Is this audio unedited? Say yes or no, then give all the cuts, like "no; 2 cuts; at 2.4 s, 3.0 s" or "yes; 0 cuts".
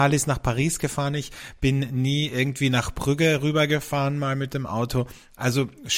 yes; 0 cuts